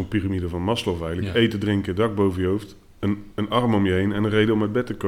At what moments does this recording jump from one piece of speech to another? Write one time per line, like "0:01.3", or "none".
none

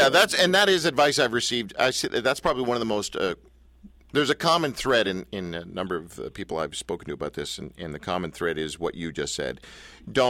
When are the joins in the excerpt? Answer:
none

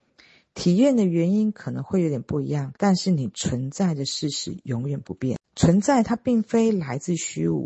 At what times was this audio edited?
0:02.8
0:05.4

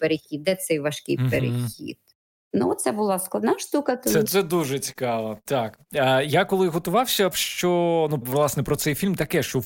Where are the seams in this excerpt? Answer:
0:04.2
0:07.3
0:08.2

